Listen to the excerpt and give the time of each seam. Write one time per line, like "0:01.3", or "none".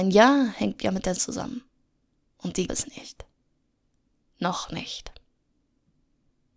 0:01.2
0:02.7